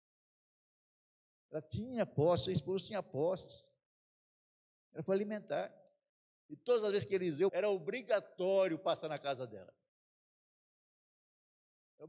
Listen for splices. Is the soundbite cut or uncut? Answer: cut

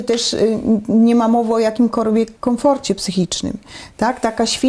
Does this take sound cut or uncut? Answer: cut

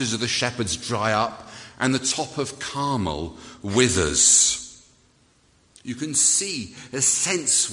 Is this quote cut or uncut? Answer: uncut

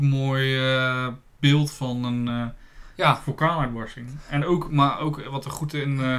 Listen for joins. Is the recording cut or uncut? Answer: uncut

